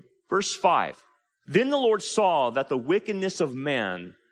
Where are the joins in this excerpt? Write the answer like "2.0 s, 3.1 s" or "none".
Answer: none